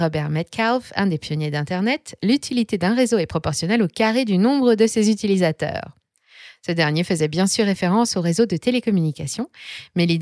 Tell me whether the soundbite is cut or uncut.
uncut